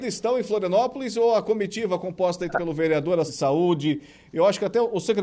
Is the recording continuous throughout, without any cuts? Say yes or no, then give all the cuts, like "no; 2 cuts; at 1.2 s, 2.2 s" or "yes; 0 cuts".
no; 2 cuts; at 2.5 s, 3.3 s